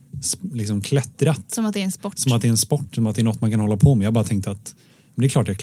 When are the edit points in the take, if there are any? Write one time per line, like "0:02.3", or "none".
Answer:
none